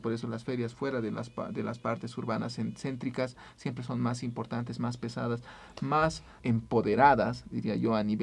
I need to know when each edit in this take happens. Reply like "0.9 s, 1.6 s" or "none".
6.4 s